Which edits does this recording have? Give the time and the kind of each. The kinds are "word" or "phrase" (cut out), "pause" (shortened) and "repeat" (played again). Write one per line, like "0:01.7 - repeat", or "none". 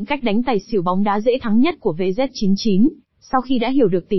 none